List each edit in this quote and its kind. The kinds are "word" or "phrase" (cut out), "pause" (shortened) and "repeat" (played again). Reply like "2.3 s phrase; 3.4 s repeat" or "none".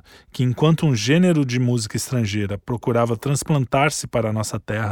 none